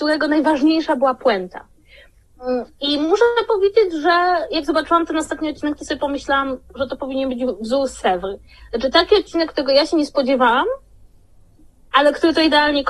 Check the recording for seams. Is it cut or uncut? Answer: uncut